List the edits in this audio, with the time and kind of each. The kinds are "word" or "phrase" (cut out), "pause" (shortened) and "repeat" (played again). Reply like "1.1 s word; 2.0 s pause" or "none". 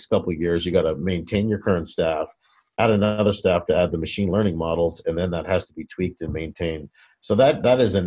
none

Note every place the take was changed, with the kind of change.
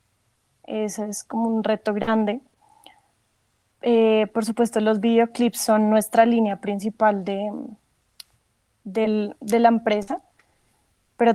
none

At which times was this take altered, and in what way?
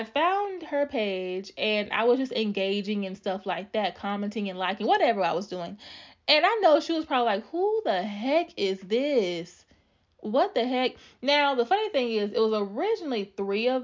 none

